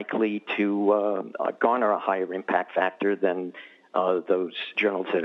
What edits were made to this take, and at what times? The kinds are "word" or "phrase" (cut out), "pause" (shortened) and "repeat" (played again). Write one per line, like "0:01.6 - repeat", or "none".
none